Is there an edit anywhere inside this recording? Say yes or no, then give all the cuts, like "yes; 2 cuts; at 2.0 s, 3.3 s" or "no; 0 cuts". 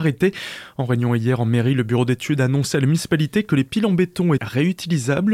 yes; 1 cut; at 4.4 s